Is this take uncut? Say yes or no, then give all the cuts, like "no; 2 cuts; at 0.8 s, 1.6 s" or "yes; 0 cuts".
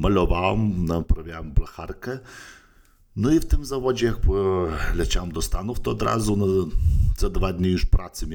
yes; 0 cuts